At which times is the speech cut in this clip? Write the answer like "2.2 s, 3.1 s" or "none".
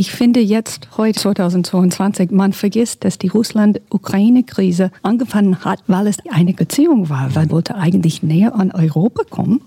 1.1 s, 5.0 s, 5.8 s, 6.2 s, 6.6 s, 7.5 s